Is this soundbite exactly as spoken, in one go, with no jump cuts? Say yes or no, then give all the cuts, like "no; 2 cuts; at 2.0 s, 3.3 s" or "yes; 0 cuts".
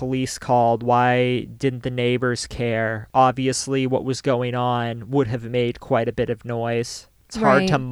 yes; 0 cuts